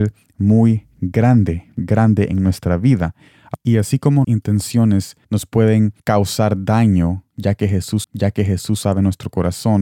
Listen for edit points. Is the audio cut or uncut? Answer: cut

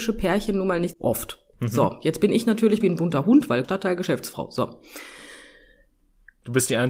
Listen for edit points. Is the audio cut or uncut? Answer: cut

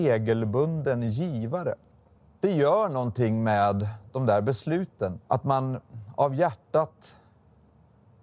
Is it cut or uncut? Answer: cut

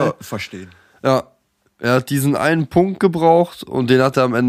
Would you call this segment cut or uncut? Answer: uncut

